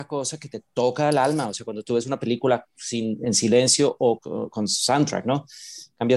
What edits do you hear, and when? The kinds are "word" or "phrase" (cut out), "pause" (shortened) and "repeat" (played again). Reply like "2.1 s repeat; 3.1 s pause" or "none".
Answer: 4.2 s word

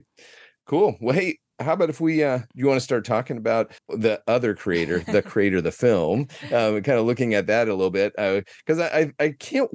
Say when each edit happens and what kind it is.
3.8 s pause

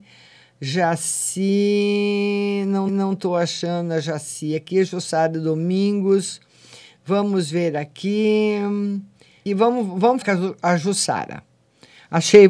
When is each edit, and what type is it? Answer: 2.9 s repeat; 9.5 s phrase; 10.2 s word

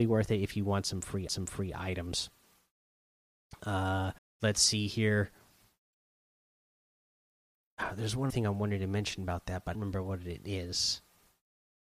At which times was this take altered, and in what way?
1.3 s repeat; 4.2 s pause; 8.3 s word; 9.7 s phrase

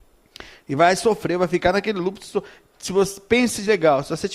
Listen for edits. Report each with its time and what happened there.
none

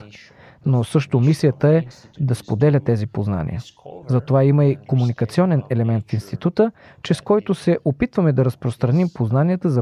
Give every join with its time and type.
none

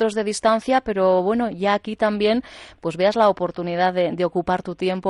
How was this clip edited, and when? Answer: none

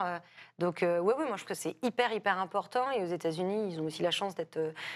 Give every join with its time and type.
1.5 s word

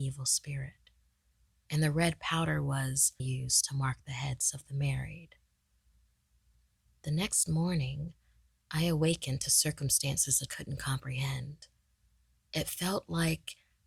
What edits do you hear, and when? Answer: 3.2 s word; 10.5 s word

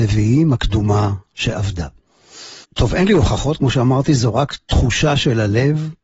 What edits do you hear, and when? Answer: 2.6 s pause

